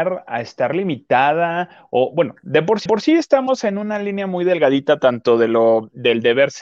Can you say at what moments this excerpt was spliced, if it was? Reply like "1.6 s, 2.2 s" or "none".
2.9 s